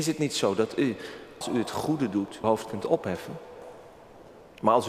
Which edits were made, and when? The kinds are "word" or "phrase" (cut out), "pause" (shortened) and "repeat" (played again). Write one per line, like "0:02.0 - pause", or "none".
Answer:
0:01.4 - word
0:02.4 - word